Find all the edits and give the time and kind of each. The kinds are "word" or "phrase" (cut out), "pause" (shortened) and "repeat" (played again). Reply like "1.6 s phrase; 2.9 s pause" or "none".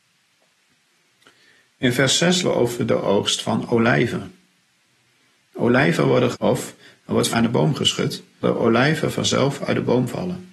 2.4 s word; 6.3 s word; 7.3 s word; 8.4 s word

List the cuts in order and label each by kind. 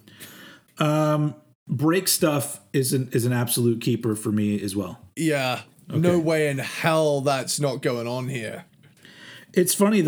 none

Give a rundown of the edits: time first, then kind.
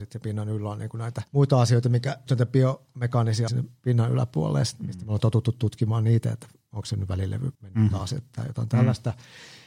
1.3 s pause; 2.3 s word; 3.5 s phrase; 7.5 s pause

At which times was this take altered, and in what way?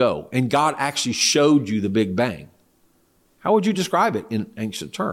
none

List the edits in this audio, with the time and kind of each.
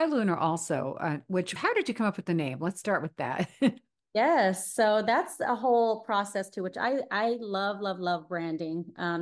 1.6 s phrase

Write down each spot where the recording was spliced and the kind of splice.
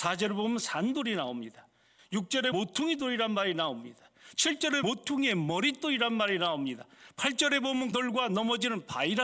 2.5 s word; 4.8 s word; 7.9 s word

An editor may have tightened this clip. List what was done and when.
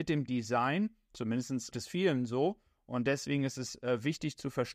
1.7 s word

